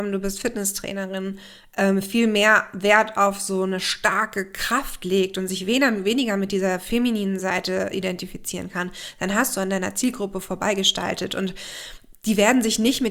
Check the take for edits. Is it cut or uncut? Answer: uncut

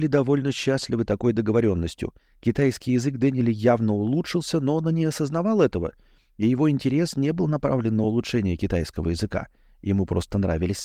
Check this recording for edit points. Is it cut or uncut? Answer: uncut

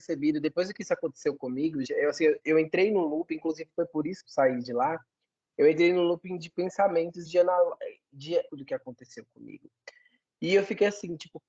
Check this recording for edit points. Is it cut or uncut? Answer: cut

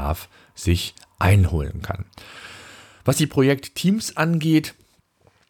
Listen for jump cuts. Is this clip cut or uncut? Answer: uncut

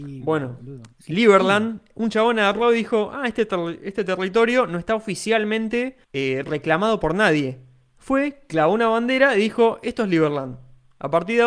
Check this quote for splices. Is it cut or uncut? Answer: cut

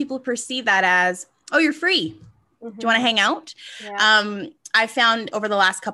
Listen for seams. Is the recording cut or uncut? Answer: uncut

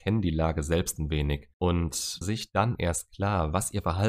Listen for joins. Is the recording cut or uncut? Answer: cut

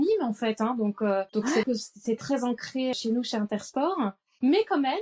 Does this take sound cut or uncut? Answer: cut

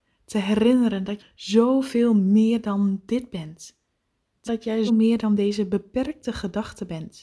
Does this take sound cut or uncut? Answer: cut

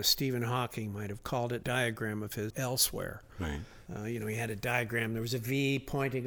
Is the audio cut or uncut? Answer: cut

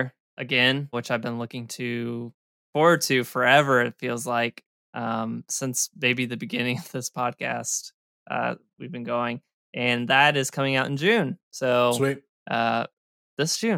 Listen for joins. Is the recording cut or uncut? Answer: cut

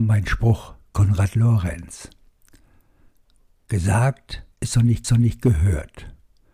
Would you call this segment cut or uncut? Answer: cut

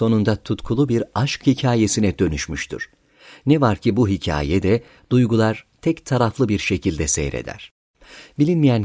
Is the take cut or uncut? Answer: uncut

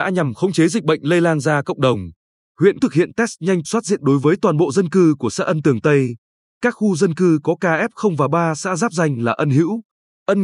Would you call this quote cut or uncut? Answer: cut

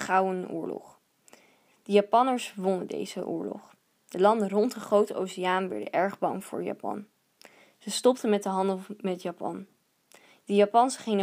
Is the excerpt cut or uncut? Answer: uncut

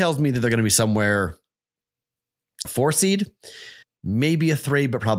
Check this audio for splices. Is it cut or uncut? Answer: cut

